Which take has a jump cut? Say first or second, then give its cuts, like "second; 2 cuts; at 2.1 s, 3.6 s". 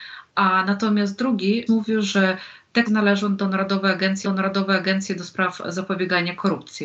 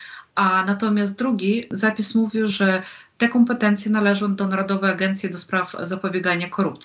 first; 3 cuts; at 1.7 s, 2.9 s, 4.2 s